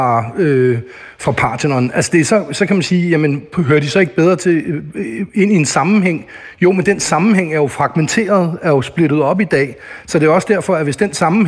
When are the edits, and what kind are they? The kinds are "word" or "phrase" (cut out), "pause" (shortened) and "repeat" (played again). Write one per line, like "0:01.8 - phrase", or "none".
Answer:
none

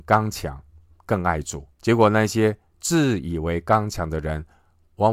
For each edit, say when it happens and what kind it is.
0:01.7 - pause

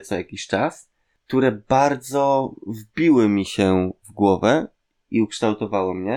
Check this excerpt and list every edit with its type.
none

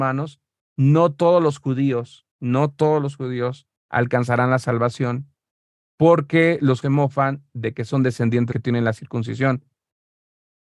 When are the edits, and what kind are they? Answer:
0:02.3 - pause
0:03.8 - pause
0:05.5 - pause
0:06.8 - word
0:08.5 - phrase

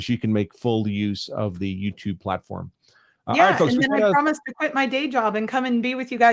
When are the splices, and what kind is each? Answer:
none

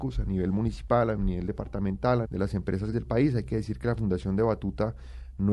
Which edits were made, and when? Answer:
0:02.2 - word
0:02.9 - word

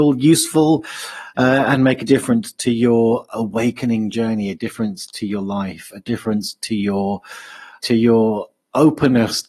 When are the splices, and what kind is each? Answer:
0:07.8 - word

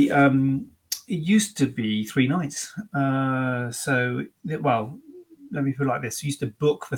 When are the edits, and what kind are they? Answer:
0:04.4 - pause

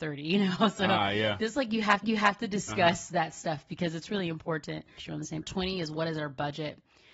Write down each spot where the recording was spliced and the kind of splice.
0:02.0 - repeat
0:05.0 - phrase
0:05.4 - phrase

